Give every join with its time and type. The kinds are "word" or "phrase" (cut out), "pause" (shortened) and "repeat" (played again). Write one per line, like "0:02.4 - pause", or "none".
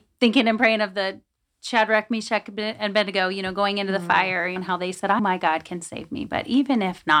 0:04.6 - word
0:05.2 - word